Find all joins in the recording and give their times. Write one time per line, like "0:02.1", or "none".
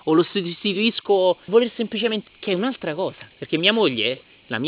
0:01.5
0:02.3
0:03.3